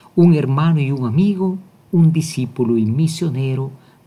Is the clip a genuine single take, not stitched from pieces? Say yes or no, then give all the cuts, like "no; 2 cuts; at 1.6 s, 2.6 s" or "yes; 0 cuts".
yes; 0 cuts